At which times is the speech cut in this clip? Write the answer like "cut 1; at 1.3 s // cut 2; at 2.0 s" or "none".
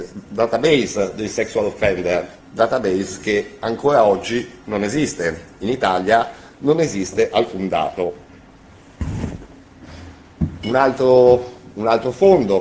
cut 1; at 2.4 s